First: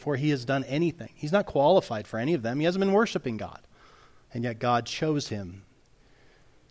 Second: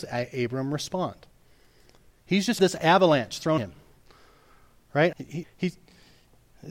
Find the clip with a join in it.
second; 4 cuts; at 2.6 s, 3.6 s, 5.1 s, 5.4 s

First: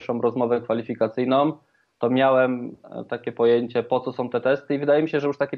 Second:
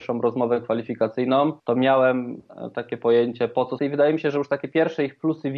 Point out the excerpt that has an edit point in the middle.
second; 2 cuts; at 1.6 s, 3.8 s

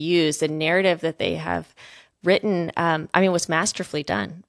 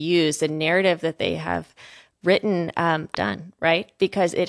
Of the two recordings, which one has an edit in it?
second; 1 cut; at 3.1 s

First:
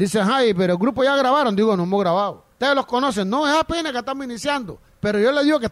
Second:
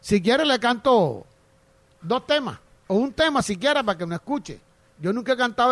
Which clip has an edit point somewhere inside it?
first; 1 cut; at 2.5 s

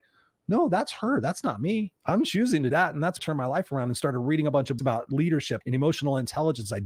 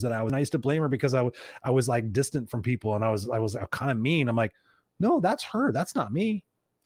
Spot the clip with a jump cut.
first; 5 cuts; at 2.0 s, 2.7 s, 3.2 s, 4.8 s, 5.6 s

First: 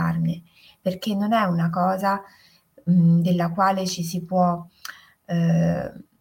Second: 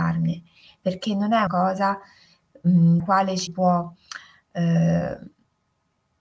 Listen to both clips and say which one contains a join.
second; 3 cuts; at 1.5 s, 3.0 s, 3.5 s

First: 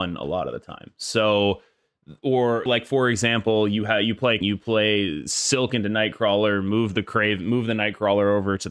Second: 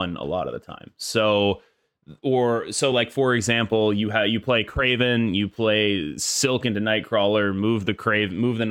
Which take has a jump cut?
first; 2 cuts; at 2.7 s, 4.4 s

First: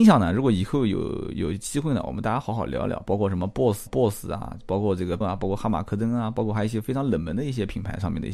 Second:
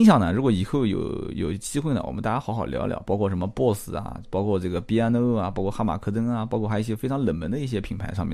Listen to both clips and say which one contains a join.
first; 2 cuts; at 3.9 s, 5.2 s

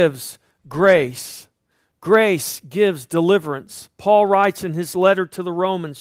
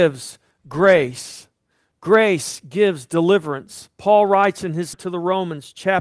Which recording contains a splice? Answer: second; 1 cut; at 4.9 s

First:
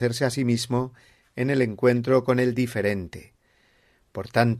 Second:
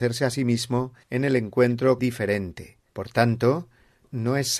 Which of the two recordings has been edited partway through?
second; 3 cuts; at 1.0 s, 2.0 s, 2.9 s

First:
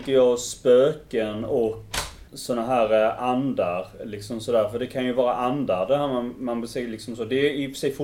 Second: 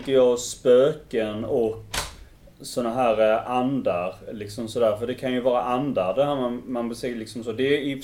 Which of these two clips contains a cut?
first; 1 cut; at 2.3 s

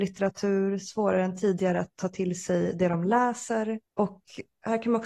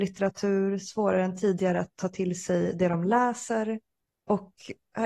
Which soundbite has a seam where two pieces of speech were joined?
first; 1 cut; at 3.9 s

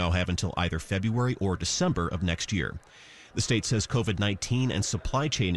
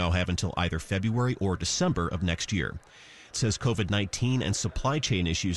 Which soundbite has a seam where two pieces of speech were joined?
second; 1 cut; at 3.3 s

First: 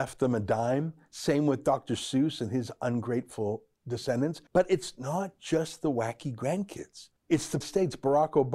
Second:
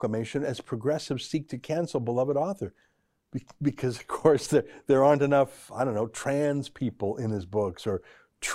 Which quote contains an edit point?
first; 3 cuts; at 4.5 s, 7.2 s, 7.6 s

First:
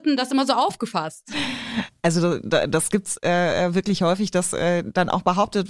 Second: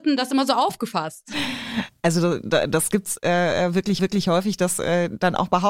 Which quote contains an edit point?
second; 1 cut; at 4.0 s

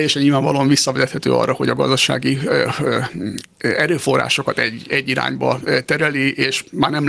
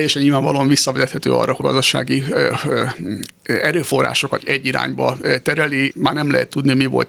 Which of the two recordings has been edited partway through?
second; 3 cuts; at 1.6 s, 4.4 s, 5.9 s

